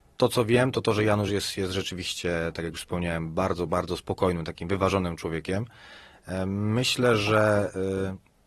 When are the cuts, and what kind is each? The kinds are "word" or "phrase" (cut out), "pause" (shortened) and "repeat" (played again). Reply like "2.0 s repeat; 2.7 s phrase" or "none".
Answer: none